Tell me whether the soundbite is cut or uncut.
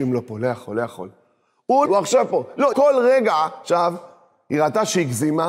cut